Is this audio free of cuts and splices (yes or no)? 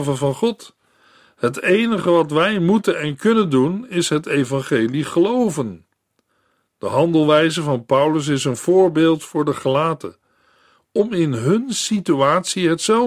yes